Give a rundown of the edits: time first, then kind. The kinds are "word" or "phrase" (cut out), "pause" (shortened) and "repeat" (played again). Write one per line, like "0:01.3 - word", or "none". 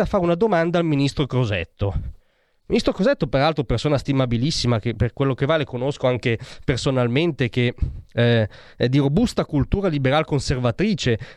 none